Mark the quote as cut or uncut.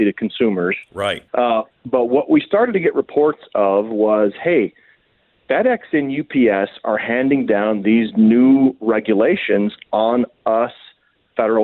cut